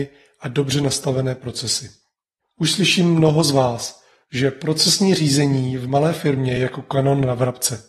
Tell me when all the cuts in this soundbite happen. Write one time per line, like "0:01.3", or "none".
none